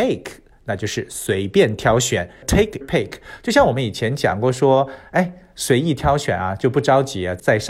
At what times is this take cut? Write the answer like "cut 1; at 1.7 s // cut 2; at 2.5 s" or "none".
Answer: cut 1; at 2.8 s